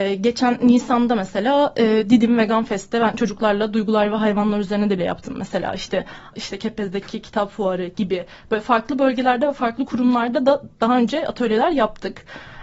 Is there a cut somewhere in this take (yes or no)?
yes